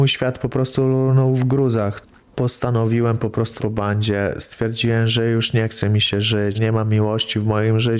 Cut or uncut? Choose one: cut